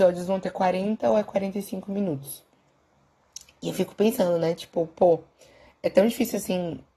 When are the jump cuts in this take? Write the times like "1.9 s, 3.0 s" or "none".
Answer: none